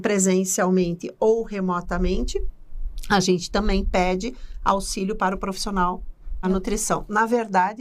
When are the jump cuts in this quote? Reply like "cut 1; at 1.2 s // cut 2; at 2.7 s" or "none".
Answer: cut 1; at 6.4 s